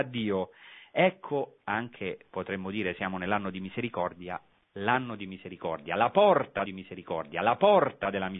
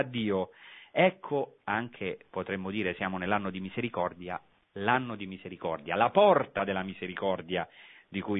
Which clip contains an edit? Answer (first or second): first